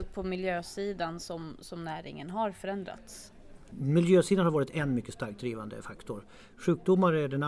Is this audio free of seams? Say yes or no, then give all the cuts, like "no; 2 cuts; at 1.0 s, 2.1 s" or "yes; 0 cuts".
yes; 0 cuts